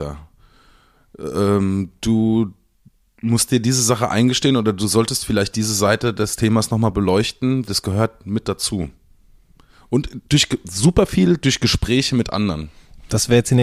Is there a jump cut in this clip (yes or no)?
yes